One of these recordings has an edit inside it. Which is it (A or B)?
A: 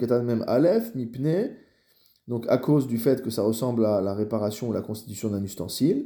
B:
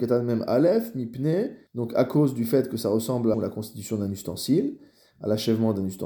B